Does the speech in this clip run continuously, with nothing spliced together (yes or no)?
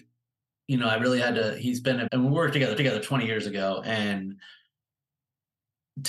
no